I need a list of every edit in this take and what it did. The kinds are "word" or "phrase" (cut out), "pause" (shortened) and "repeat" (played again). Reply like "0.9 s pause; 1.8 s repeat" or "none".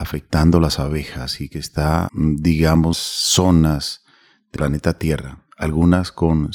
2.1 s word; 2.9 s word; 4.6 s word